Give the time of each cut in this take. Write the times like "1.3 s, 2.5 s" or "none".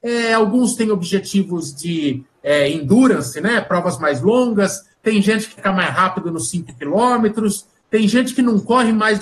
5.6 s